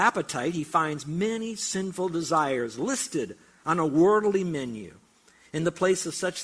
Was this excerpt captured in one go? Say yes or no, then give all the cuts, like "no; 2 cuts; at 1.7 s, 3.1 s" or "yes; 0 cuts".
yes; 0 cuts